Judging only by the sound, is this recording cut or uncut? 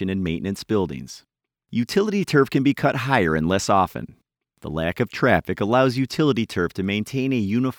uncut